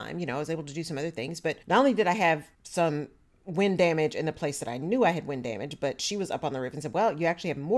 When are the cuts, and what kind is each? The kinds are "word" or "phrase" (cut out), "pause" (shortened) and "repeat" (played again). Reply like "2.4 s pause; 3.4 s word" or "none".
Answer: 1.6 s pause; 2.5 s pause